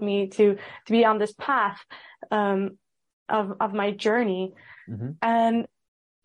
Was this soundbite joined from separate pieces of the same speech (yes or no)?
no